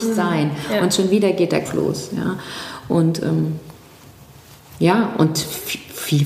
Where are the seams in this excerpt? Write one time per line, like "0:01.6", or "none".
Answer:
0:01.7